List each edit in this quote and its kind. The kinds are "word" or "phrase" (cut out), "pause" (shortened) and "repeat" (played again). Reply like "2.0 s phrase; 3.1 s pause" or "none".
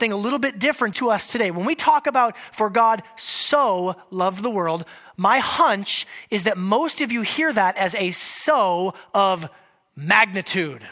0.9 s phrase